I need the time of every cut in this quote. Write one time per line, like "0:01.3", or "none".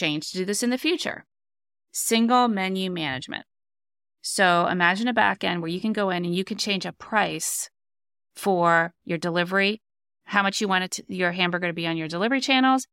none